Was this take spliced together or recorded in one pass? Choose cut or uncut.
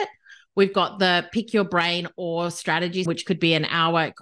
cut